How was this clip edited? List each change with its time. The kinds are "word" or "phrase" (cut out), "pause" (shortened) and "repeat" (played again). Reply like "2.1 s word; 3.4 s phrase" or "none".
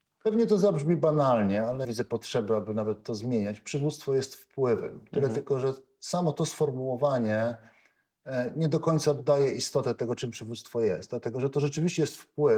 1.8 s phrase

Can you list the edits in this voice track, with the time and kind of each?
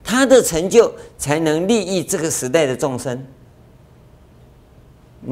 none

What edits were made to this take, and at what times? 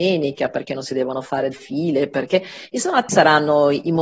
1.5 s word; 3.1 s word

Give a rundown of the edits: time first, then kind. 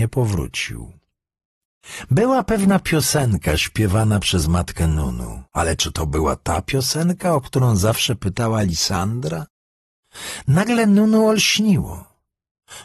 5.5 s pause

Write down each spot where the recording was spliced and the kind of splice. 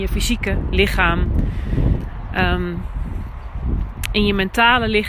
none

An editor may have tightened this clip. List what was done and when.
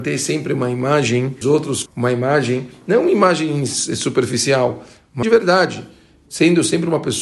1.4 s phrase; 1.9 s word; 5.2 s word

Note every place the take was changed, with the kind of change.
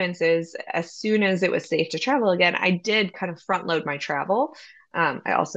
none

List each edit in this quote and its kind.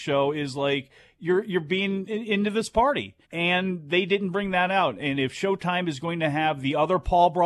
3.2 s pause

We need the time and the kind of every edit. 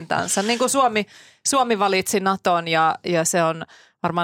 none

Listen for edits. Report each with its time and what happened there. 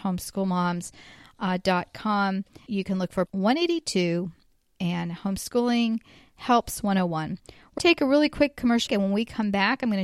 2.7 s word; 3.3 s word; 7.8 s word; 8.9 s word

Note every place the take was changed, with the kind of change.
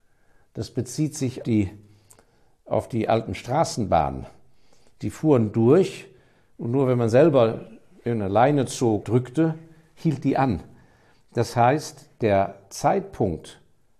1.4 s word; 9.0 s word

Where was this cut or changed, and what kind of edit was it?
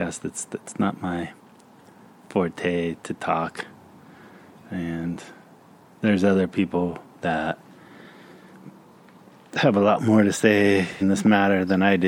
11.0 s word

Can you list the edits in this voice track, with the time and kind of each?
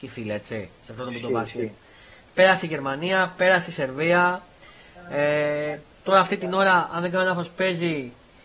none

